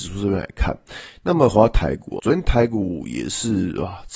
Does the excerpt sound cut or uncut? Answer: cut